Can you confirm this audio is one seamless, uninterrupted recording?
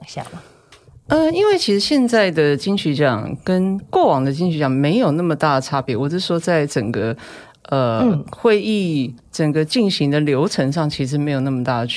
no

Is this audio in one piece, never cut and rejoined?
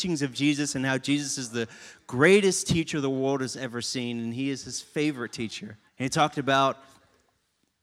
no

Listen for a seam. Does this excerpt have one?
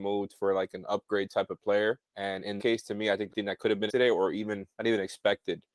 yes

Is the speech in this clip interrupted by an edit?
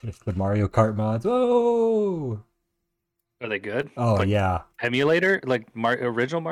yes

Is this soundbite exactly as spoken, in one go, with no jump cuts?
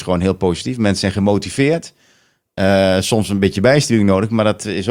yes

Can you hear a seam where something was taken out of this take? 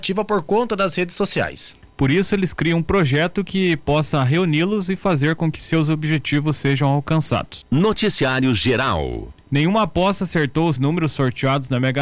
yes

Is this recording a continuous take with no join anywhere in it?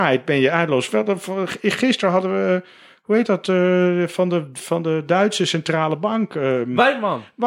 yes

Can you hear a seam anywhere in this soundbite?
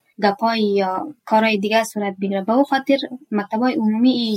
no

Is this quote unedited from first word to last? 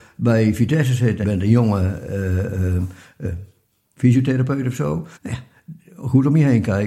no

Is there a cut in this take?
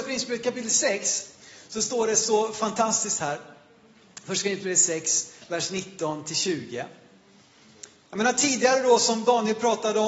no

